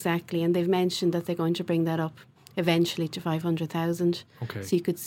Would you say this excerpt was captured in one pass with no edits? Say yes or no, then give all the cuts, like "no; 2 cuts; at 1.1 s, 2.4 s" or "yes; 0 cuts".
yes; 0 cuts